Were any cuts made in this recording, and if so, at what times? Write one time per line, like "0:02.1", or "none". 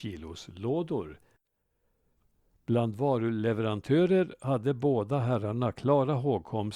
none